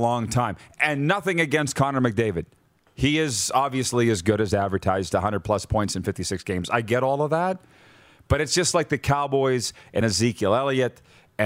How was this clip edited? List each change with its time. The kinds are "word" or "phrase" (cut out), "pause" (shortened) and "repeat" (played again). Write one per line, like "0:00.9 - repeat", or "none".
none

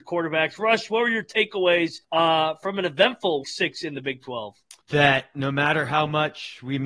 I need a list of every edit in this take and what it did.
0:02.0 - pause
0:03.4 - word
0:04.8 - pause

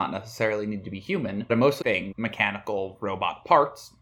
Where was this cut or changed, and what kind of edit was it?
0:01.5 - word
0:01.8 - word
0:02.1 - word

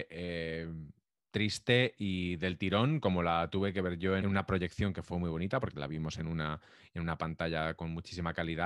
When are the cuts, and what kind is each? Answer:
0:04.2 - phrase

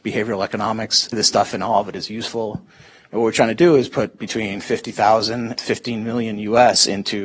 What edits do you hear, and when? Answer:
0:01.1 - word
0:05.6 - word

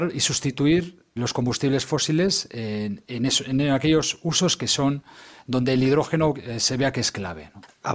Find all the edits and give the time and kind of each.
0:01.2 - word

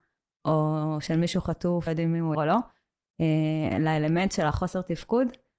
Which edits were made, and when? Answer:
0:01.9 - word
0:02.3 - word

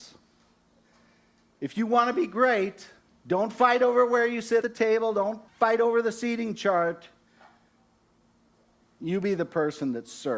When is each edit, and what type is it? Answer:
0:03.0 - pause
0:04.6 - word
0:05.5 - pause

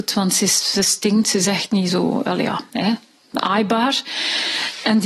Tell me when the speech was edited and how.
none

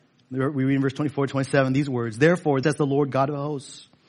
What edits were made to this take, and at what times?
0:02.6 - word

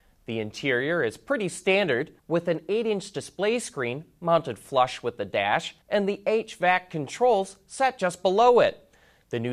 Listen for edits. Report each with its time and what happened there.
0:02.2 - pause
0:05.8 - pause

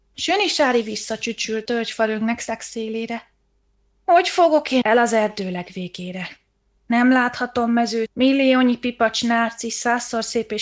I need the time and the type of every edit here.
0:01.7 - word
0:04.8 - word
0:08.1 - word

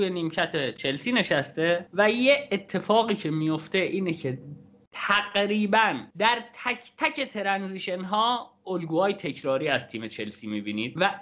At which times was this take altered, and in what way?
none

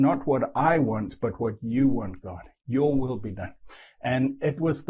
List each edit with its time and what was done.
none

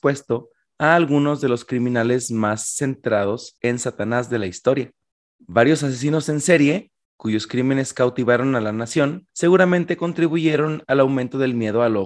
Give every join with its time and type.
0:05.1 - pause
0:09.3 - pause

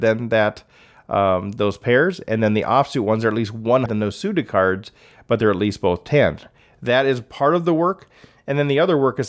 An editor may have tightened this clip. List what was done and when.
0:03.9 - word

